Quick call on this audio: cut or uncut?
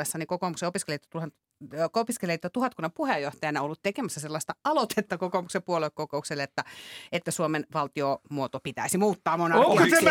uncut